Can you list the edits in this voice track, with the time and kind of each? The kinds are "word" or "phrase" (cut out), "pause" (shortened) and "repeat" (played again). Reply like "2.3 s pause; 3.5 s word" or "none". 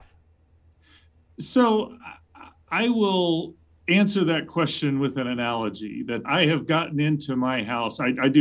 3.7 s pause; 6.2 s word